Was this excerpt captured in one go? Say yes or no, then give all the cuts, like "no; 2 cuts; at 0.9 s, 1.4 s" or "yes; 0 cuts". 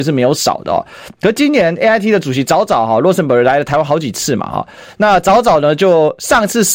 yes; 0 cuts